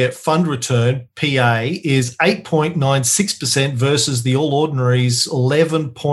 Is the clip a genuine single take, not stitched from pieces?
yes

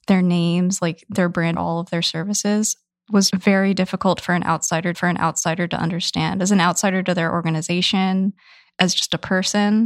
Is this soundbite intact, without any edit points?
no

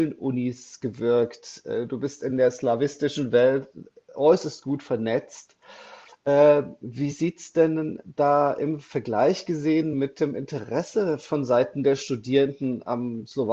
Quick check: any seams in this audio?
no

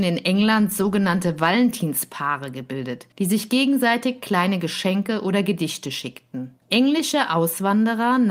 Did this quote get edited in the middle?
yes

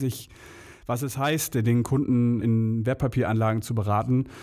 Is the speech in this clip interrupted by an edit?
yes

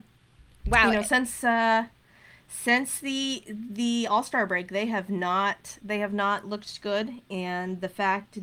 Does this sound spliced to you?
no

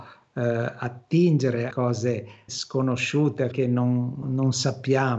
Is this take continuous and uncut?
no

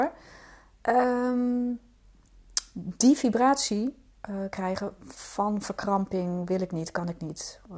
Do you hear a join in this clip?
no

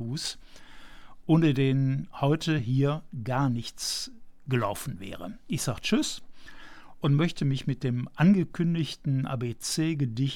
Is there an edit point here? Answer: no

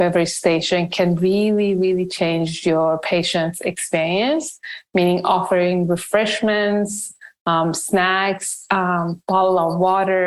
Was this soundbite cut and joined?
no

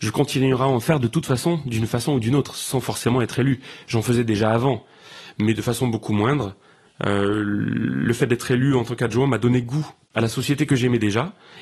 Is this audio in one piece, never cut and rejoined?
yes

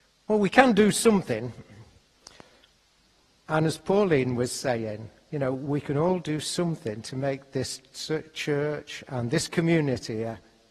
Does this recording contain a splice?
no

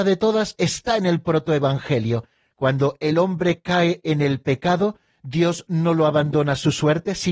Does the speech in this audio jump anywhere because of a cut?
no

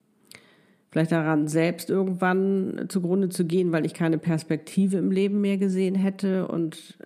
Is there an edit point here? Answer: no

